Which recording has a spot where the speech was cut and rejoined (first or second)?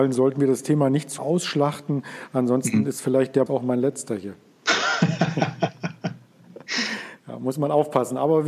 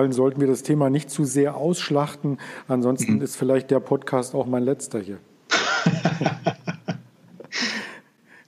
first